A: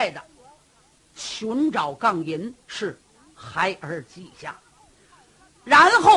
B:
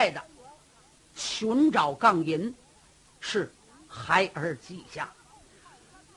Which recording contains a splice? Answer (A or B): A